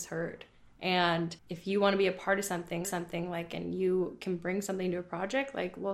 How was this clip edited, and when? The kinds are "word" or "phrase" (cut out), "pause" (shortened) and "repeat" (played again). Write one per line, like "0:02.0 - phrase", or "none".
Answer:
0:01.4 - pause
0:02.8 - repeat